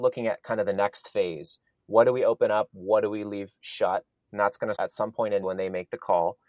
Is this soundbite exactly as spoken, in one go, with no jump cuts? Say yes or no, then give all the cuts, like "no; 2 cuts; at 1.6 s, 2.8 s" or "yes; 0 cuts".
no; 2 cuts; at 4.8 s, 5.4 s